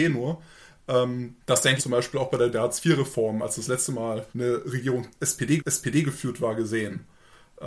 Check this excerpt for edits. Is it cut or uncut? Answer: cut